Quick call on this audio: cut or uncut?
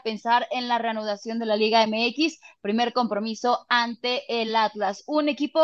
uncut